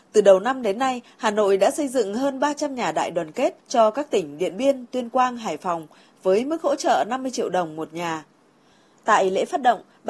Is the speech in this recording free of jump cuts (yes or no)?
no